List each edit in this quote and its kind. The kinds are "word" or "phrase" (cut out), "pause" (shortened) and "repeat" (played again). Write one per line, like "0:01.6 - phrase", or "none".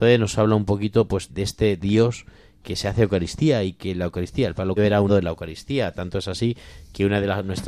0:01.3 - word
0:01.8 - word
0:02.6 - word
0:04.8 - word
0:05.1 - word